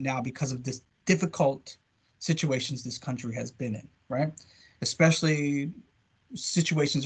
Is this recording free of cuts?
yes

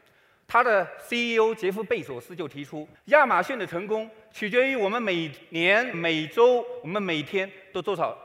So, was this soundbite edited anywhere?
yes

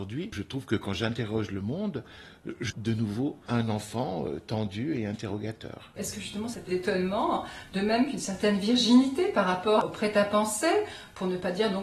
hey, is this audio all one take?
no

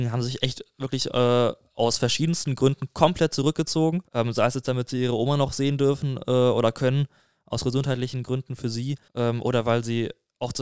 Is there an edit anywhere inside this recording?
yes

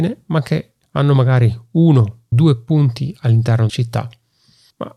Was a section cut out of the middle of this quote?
yes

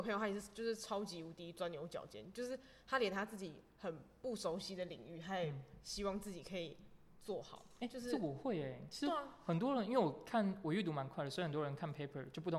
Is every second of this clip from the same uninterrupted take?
yes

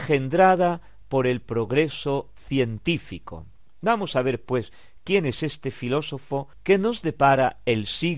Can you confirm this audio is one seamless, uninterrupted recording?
yes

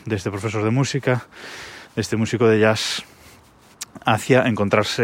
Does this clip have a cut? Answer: no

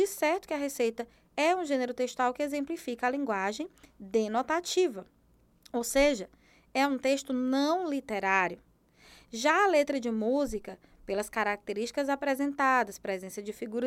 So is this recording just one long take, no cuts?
yes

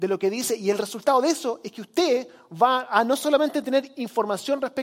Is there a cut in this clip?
no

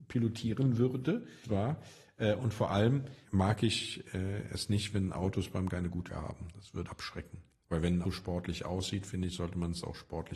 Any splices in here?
yes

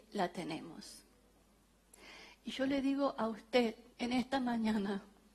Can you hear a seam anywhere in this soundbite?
yes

